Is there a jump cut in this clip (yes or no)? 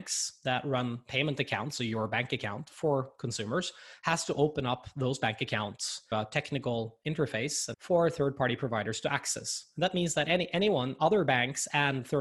yes